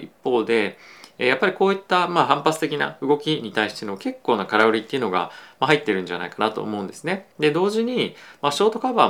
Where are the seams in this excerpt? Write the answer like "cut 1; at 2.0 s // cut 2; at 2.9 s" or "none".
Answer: cut 1; at 7.3 s